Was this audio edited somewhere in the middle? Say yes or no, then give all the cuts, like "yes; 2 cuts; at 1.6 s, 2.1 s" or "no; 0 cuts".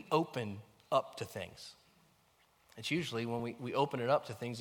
no; 0 cuts